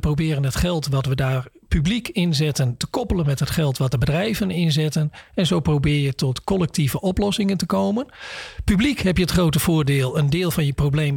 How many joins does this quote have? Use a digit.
0